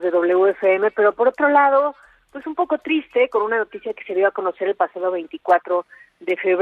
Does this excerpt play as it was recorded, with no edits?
yes; 0 cuts

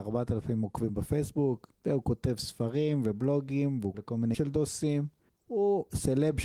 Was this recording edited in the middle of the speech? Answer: yes; 3 cuts; at 1.8 s, 3.9 s, 4.3 s

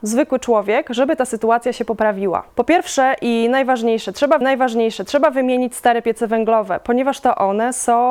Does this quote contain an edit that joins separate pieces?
yes; 2 cuts; at 2.5 s, 4.4 s

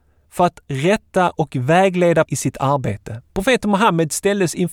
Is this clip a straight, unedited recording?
no; 2 cuts; at 2.2 s, 3.3 s

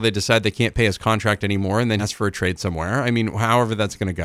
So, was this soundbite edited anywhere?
yes; 1 cut; at 2.0 s

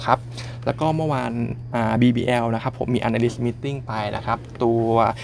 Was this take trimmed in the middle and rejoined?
no; 0 cuts

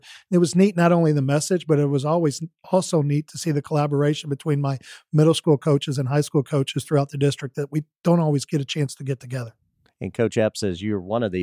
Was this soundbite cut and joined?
no; 0 cuts

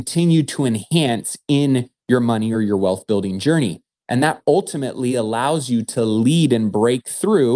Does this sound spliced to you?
no; 0 cuts

